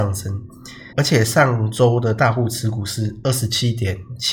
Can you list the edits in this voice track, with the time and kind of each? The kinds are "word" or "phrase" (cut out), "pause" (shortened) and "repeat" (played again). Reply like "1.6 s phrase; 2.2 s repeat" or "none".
0.9 s pause